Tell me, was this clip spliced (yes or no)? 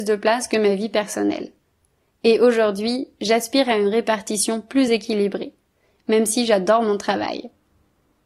no